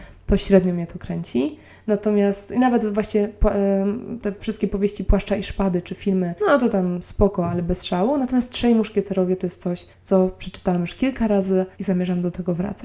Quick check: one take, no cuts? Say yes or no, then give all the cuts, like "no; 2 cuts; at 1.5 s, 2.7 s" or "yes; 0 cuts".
no; 3 cuts; at 6.4 s, 9.9 s, 11.7 s